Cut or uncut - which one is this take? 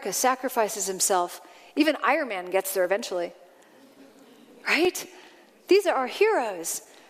uncut